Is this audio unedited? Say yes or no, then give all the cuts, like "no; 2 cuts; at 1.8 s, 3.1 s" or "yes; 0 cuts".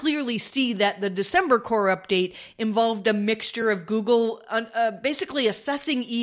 yes; 0 cuts